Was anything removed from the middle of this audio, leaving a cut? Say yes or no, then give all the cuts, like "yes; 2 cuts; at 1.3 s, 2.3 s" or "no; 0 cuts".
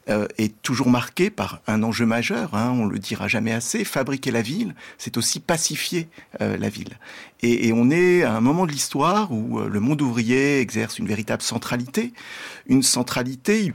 no; 0 cuts